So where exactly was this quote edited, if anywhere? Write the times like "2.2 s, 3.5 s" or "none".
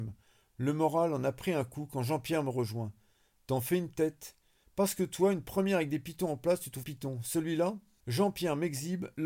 6.8 s